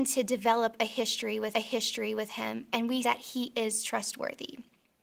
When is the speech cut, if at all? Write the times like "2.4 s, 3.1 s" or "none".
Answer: 1.5 s, 3.0 s

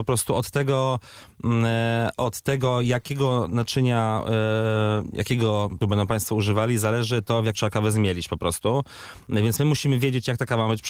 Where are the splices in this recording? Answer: 5.8 s, 7.5 s

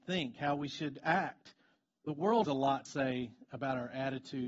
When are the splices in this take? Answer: 1.7 s, 2.4 s, 2.8 s

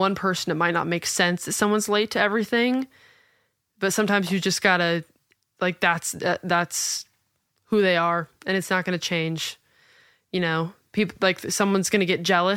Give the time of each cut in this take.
none

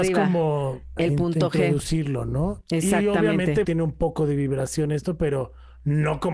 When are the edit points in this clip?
1.0 s, 3.6 s

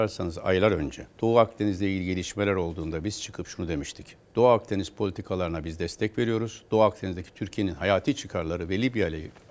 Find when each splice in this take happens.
1.1 s, 4.2 s

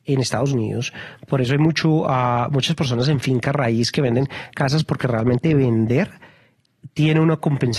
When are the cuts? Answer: none

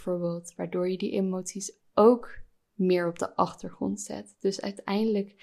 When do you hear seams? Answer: none

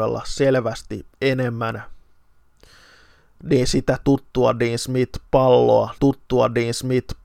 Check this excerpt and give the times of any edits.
1.1 s, 6.0 s

